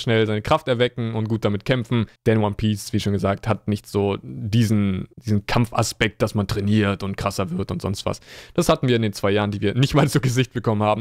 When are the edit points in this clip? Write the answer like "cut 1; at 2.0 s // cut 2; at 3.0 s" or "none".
cut 1; at 2.2 s // cut 2; at 5.1 s